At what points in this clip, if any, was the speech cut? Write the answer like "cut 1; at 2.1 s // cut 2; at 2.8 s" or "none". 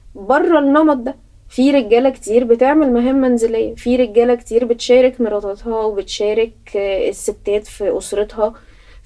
none